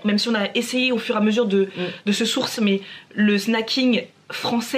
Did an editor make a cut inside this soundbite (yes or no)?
yes